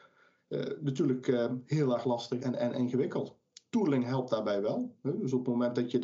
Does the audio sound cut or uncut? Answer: cut